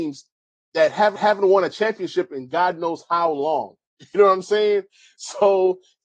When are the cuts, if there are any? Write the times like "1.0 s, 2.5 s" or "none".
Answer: 1.2 s